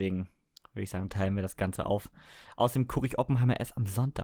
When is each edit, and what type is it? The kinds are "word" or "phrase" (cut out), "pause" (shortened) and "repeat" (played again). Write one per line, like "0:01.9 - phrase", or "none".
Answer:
none